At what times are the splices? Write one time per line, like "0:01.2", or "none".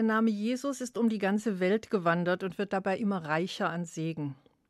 none